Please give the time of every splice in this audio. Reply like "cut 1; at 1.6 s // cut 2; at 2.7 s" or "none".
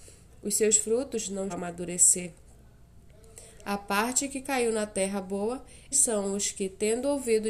cut 1; at 1.5 s // cut 2; at 5.9 s